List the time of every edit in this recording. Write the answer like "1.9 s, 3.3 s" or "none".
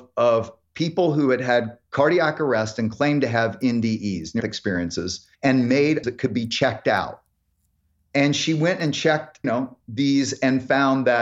4.4 s, 5.3 s, 6.0 s, 9.4 s